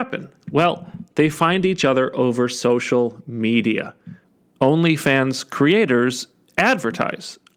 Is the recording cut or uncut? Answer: uncut